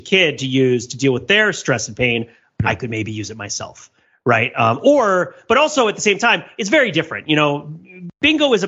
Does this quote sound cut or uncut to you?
uncut